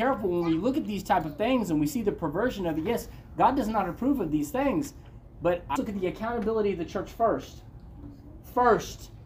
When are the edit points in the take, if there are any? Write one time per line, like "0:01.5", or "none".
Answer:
0:05.8

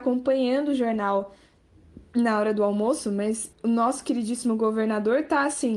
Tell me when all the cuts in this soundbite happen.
0:03.5

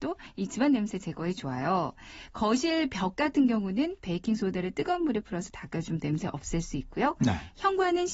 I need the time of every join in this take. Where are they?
none

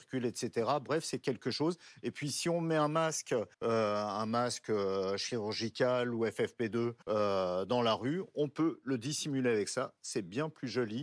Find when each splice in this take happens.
0:03.5
0:07.0

